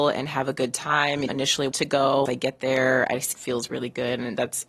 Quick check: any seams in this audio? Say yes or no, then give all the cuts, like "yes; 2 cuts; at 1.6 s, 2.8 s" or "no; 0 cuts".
yes; 4 cuts; at 1.3 s, 1.7 s, 2.3 s, 3.3 s